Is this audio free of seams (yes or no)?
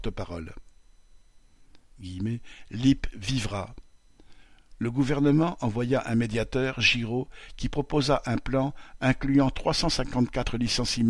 yes